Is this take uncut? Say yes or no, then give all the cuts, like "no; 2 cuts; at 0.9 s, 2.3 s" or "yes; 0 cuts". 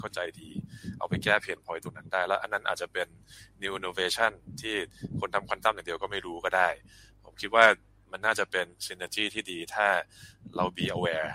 yes; 0 cuts